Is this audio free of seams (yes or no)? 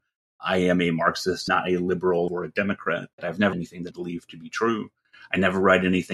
no